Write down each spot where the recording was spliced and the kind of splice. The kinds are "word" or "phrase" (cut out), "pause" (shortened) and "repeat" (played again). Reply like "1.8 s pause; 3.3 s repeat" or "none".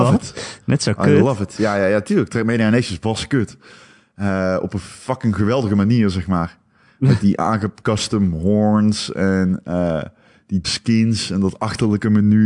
10.6 s word